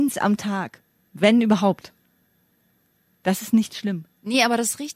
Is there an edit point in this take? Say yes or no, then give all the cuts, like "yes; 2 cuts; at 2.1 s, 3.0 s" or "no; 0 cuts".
no; 0 cuts